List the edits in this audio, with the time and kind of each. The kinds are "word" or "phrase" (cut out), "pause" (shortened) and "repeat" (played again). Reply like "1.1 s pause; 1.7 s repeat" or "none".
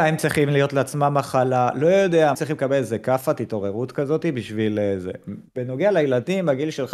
2.3 s phrase; 5.5 s pause